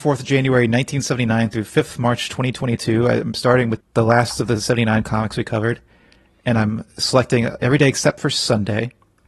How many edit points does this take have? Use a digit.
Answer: 1